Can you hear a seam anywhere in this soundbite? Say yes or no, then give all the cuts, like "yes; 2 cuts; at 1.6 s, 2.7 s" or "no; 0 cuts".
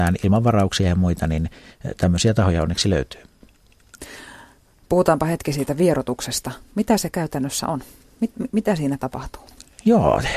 no; 0 cuts